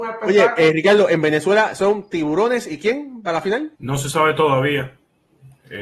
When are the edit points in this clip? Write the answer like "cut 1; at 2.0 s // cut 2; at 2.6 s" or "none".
cut 1; at 3.8 s